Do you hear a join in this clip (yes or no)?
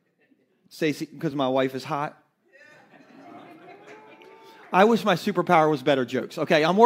no